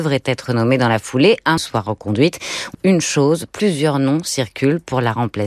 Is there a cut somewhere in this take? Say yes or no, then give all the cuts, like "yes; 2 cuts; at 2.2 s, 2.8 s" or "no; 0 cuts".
yes; 2 cuts; at 1.6 s, 2.7 s